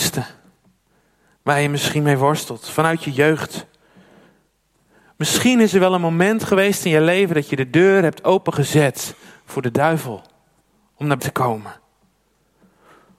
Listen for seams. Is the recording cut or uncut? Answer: cut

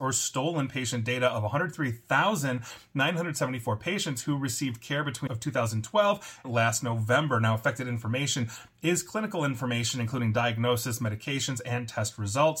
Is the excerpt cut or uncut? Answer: cut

